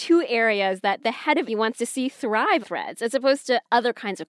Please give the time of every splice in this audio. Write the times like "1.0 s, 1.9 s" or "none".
1.5 s, 2.6 s